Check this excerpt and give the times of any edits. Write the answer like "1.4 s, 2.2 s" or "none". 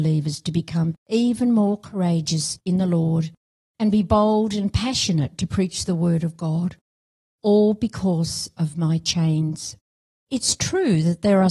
none